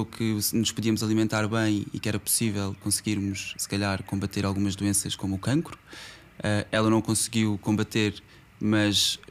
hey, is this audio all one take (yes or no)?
no